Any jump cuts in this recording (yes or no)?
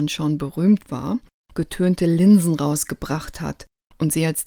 no